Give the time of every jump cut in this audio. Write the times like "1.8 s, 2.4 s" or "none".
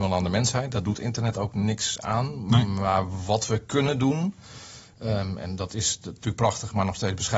none